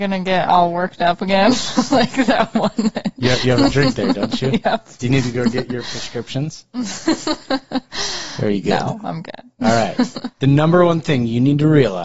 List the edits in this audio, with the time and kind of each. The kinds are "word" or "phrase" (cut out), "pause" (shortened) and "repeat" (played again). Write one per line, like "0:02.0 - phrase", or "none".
0:10.3 - pause

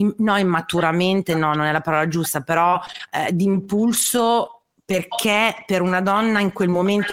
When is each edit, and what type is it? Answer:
none

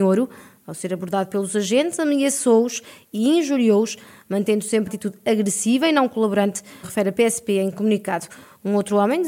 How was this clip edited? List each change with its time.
0:04.9 - word
0:06.8 - word

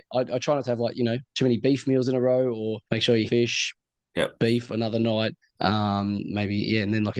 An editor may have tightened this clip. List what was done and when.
0:02.8 - pause
0:03.3 - phrase
0:05.4 - pause

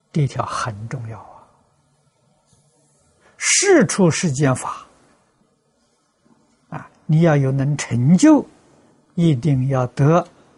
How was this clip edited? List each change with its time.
none

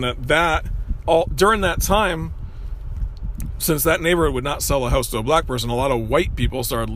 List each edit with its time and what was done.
0:01.0 - word

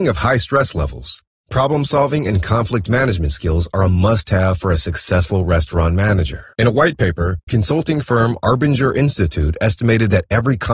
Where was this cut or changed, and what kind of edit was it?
0:06.5 - pause
0:07.5 - word

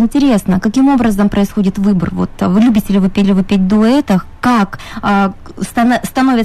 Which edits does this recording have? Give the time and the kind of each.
0:03.2 - repeat

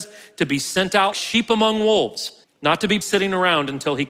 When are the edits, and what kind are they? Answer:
0:01.1 - word
0:02.4 - pause
0:03.0 - word

